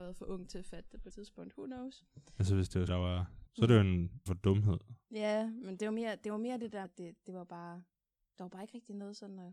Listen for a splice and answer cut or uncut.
cut